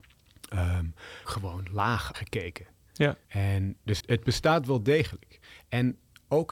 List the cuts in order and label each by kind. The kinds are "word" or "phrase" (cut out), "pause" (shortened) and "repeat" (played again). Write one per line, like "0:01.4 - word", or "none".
0:01.2 - phrase
0:02.1 - phrase
0:03.2 - pause
0:04.0 - word